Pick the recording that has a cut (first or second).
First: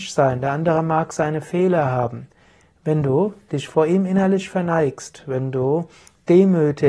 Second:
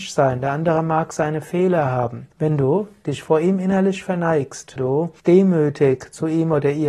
second